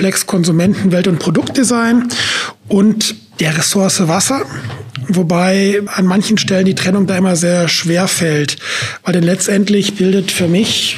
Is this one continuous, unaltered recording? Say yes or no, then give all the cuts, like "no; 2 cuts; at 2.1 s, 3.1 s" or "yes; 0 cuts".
no; 1 cut; at 5.9 s